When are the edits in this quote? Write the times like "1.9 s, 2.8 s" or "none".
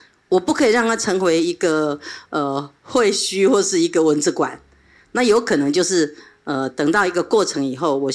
none